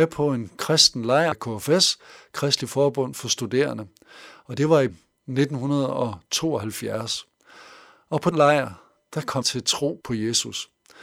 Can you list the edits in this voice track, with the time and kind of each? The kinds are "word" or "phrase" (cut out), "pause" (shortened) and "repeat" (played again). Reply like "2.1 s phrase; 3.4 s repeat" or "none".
1.3 s word; 4.9 s word; 8.3 s word; 9.4 s word; 10.0 s word